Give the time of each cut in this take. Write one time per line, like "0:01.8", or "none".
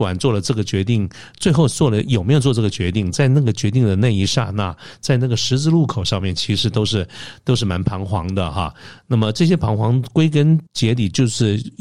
0:10.7